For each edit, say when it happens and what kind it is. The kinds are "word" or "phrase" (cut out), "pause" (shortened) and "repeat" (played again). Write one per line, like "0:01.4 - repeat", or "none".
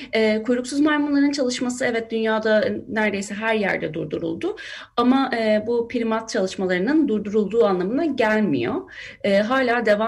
none